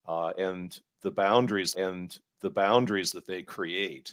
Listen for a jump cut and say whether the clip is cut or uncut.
cut